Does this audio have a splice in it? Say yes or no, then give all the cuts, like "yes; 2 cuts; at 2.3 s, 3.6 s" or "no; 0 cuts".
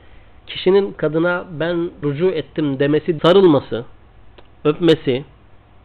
yes; 3 cuts; at 0.9 s, 2.0 s, 3.2 s